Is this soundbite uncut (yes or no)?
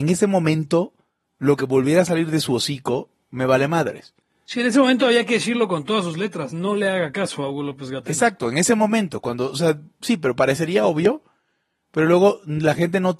yes